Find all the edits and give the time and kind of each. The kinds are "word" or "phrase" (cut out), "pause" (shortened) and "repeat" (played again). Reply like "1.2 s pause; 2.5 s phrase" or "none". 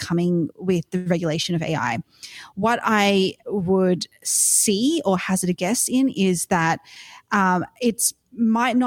none